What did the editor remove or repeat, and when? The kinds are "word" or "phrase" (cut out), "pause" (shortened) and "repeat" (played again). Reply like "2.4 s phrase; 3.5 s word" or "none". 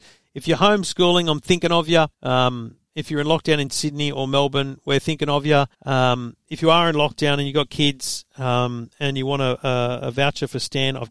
2.1 s pause; 5.7 s pause